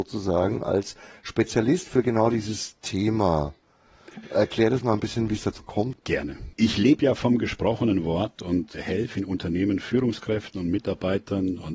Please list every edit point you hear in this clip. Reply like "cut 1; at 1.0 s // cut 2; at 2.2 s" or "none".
none